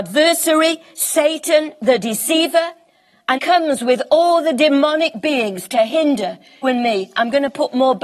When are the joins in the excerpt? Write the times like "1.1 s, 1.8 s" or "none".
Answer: 3.4 s, 6.6 s